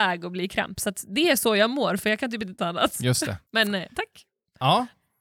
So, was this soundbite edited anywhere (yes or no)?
yes